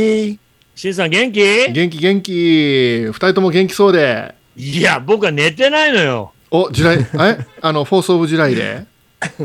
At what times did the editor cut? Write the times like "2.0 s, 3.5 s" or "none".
4.4 s